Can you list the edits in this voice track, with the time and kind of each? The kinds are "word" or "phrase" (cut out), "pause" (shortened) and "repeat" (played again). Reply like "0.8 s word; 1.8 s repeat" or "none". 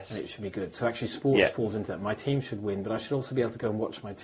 none